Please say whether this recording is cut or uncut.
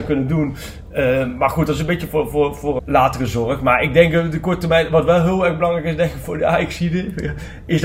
cut